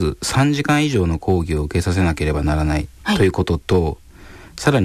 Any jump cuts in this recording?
yes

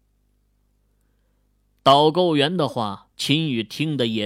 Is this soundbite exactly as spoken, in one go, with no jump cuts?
no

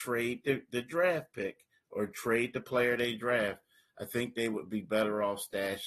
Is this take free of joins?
yes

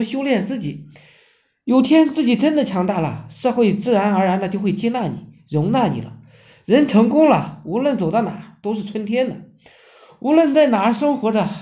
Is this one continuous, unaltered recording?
yes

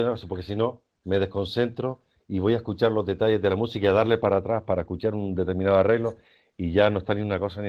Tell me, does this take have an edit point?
no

